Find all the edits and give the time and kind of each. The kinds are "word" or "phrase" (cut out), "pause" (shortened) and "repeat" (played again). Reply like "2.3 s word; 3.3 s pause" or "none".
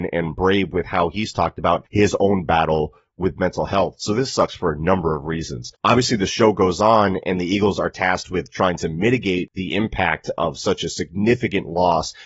none